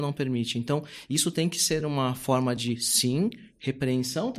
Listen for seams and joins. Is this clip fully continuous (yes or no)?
yes